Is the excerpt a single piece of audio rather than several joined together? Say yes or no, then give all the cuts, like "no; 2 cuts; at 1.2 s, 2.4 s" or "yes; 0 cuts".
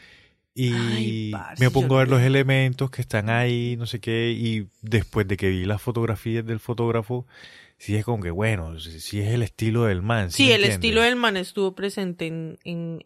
yes; 0 cuts